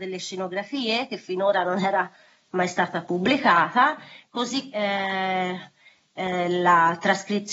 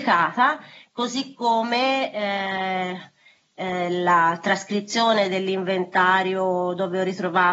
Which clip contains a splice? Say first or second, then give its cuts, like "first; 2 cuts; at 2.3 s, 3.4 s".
first; 1 cut; at 4.7 s